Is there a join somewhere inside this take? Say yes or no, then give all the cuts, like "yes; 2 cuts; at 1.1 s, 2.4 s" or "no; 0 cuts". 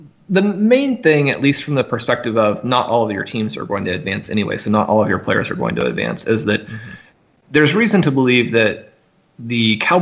no; 0 cuts